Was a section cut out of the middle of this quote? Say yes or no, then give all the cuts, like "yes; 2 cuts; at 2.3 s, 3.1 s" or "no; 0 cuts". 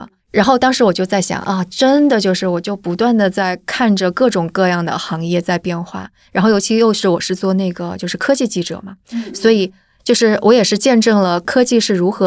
no; 0 cuts